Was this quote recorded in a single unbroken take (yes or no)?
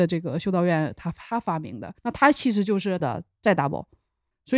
no